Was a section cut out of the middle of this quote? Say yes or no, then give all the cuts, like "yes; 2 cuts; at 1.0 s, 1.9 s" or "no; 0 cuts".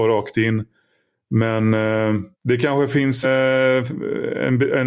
yes; 2 cuts; at 2.3 s, 3.2 s